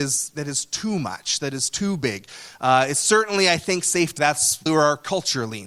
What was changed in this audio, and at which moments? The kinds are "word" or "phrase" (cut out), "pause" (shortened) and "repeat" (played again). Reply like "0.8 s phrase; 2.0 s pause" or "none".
4.2 s word; 4.7 s word